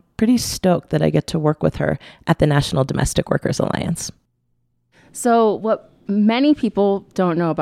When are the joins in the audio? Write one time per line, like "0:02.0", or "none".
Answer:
none